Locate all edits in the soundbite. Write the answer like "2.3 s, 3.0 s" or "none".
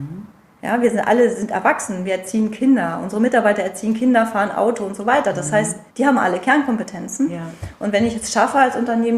5.9 s